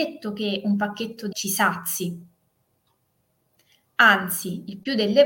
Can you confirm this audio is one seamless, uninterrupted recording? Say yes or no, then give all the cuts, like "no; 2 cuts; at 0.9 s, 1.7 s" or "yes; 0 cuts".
no; 1 cut; at 1.3 s